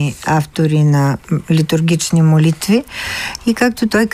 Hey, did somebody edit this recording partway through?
no; 0 cuts

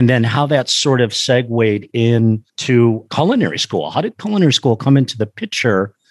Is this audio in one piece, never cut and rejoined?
no; 1 cut; at 2.5 s

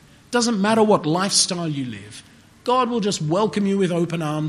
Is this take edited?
no; 0 cuts

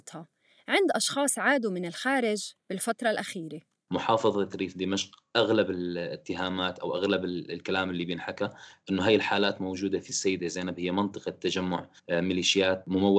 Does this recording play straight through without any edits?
no; 1 cut; at 12.0 s

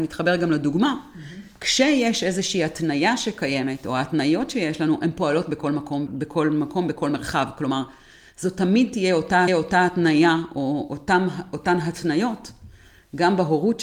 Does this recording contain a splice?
yes; 2 cuts; at 6.1 s, 9.5 s

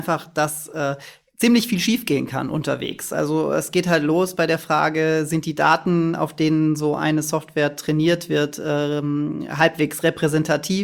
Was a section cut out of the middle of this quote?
no; 0 cuts

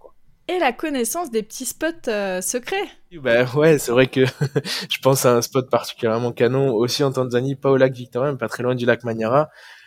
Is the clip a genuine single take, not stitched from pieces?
yes; 0 cuts

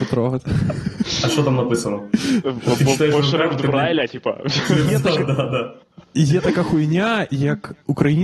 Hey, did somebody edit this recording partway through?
no; 0 cuts

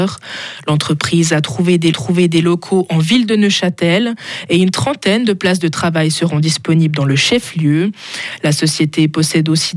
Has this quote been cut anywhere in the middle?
yes; 1 cut; at 1.9 s

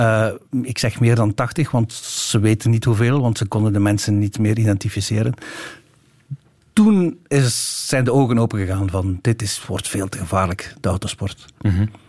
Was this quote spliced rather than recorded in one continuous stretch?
no; 0 cuts

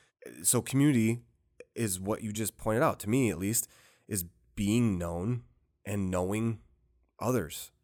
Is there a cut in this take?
no; 0 cuts

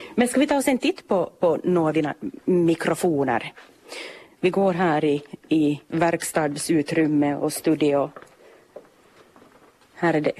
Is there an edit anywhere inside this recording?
yes; 1 cut; at 5.9 s

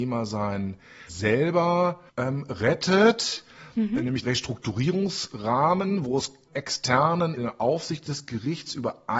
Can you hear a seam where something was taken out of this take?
yes; 5 cuts; at 1.1 s, 2.1 s, 4.2 s, 6.5 s, 7.4 s

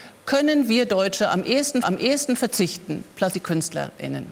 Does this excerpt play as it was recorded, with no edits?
no; 2 cuts; at 1.8 s, 3.3 s

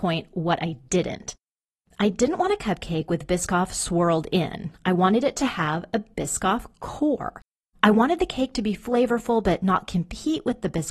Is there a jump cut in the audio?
no; 0 cuts

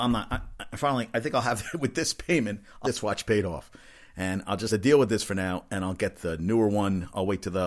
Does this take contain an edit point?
yes; 2 cuts; at 2.8 s, 4.7 s

